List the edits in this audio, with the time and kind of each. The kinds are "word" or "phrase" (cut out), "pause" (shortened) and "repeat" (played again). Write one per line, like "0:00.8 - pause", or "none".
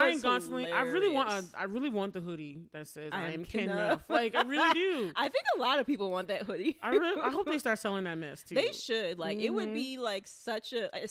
none